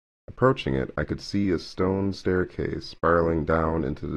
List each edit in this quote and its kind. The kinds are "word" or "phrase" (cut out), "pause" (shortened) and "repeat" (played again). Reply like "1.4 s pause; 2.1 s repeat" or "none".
none